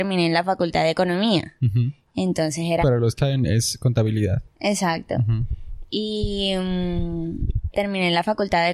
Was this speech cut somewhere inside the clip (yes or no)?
yes